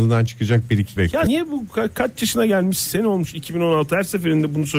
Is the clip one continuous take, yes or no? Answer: no